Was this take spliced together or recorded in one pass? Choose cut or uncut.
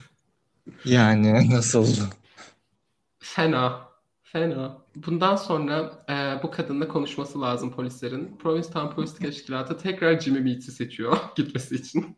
cut